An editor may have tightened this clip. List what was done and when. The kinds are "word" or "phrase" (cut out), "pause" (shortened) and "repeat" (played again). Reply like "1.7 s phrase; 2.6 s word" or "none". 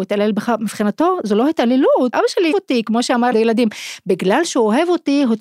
2.1 s word; 2.5 s word; 3.3 s phrase